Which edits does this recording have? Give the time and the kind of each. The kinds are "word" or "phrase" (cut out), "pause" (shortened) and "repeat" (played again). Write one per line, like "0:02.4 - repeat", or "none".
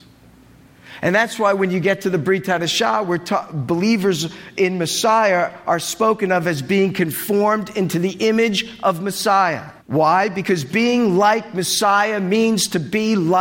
0:09.8 - pause